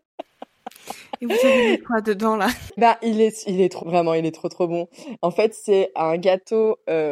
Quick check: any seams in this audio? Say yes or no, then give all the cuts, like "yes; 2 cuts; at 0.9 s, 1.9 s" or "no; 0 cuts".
yes; 2 cuts; at 2.8 s, 3.8 s